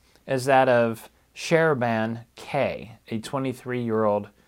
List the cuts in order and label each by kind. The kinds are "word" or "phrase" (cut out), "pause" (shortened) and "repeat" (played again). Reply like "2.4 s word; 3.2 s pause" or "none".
none